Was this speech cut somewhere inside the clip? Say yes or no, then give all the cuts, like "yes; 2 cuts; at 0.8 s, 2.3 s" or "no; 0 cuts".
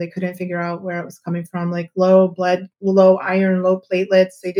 yes; 1 cut; at 2.7 s